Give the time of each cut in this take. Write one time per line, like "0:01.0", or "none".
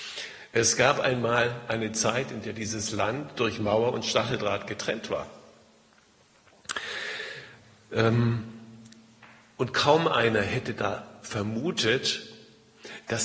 none